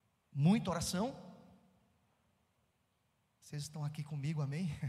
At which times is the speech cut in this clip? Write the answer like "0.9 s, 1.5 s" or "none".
none